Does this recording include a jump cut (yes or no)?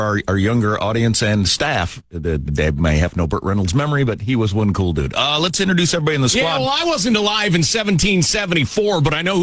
yes